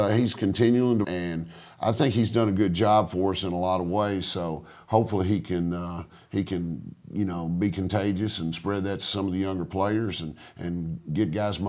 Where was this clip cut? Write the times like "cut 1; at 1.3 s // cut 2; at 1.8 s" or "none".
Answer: cut 1; at 1.0 s